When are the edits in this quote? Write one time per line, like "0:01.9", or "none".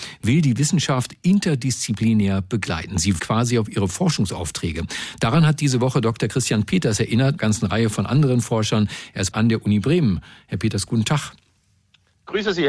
0:03.2
0:07.4
0:09.3